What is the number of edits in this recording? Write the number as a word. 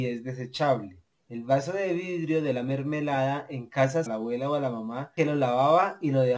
one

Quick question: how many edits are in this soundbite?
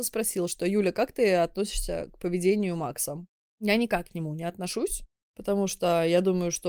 zero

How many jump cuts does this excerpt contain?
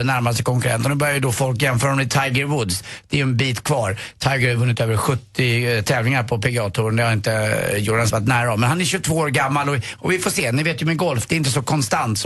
two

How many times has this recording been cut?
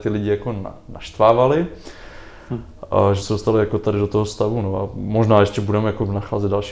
one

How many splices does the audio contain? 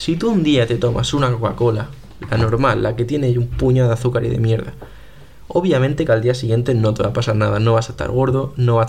zero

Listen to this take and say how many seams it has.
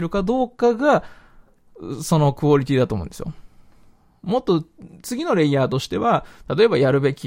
one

